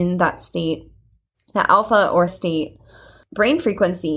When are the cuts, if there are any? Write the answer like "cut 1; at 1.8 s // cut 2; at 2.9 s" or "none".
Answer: cut 1; at 2.3 s